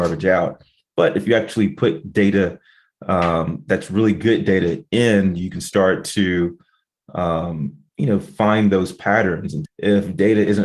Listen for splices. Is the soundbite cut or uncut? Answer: cut